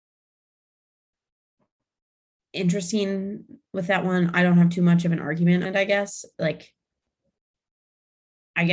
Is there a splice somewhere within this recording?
yes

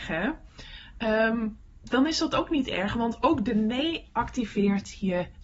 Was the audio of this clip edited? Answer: no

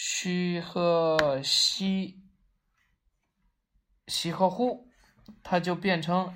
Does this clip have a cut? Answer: no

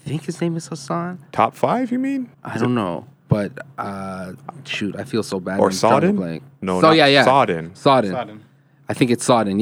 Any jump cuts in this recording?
yes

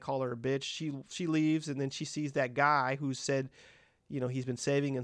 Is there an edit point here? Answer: no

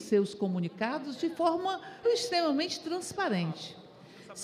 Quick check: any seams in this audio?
yes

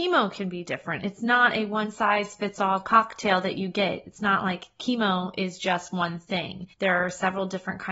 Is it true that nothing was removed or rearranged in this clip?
no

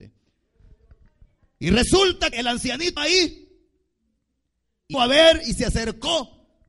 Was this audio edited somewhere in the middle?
yes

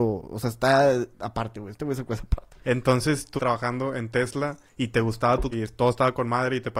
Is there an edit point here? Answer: yes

